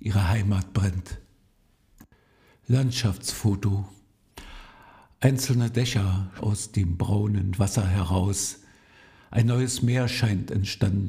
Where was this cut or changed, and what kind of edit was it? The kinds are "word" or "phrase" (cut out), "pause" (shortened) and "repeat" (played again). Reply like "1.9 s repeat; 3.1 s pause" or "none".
6.4 s word; 7.6 s word